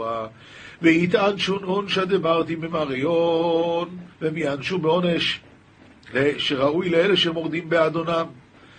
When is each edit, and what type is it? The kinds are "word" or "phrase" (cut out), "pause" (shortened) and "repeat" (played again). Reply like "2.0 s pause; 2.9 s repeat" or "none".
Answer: 4.1 s pause